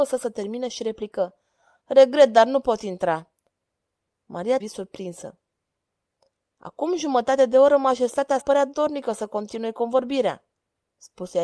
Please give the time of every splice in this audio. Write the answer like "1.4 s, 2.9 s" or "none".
4.6 s, 8.4 s